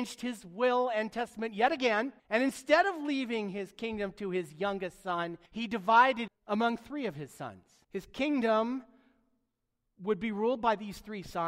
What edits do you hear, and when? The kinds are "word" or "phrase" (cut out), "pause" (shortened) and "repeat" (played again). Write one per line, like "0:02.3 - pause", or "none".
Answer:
0:02.2 - pause
0:05.5 - pause
0:06.3 - word
0:07.8 - pause